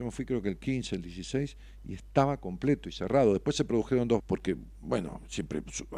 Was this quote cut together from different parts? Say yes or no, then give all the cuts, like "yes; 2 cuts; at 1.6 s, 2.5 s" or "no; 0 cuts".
yes; 1 cut; at 4.2 s